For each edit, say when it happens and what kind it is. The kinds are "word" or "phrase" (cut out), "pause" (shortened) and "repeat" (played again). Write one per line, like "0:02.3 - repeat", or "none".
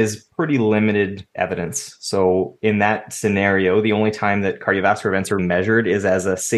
0:01.3 - pause
0:05.4 - word